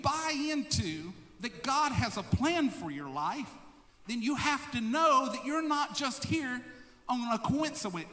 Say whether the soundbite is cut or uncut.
uncut